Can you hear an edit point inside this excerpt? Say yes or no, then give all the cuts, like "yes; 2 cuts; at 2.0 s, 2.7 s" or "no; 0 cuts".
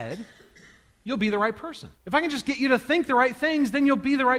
yes; 1 cut; at 1.9 s